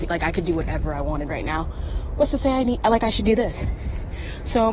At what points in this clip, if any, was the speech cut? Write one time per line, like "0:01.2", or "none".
none